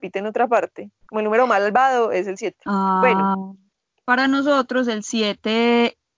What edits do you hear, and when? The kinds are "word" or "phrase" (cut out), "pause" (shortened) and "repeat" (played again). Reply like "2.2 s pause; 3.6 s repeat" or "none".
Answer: 1.0 s pause; 2.6 s pause